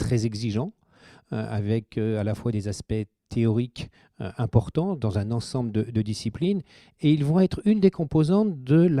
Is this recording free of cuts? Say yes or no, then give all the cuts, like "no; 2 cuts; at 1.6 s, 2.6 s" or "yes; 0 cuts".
yes; 0 cuts